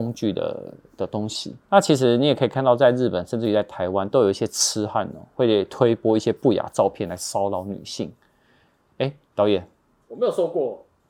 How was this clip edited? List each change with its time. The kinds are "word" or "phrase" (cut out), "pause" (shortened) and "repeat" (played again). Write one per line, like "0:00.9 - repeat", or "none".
none